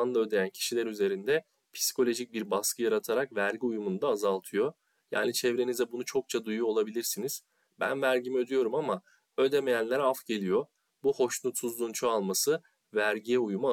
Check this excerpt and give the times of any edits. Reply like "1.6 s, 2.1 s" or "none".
none